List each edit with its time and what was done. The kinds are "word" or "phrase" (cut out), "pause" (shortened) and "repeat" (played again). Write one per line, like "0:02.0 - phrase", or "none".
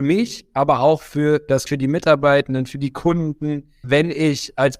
0:01.7 - word
0:03.8 - word